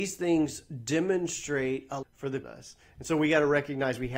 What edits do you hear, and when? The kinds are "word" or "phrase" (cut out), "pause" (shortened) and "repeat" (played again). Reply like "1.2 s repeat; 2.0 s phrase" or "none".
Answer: 2.0 s word; 2.4 s phrase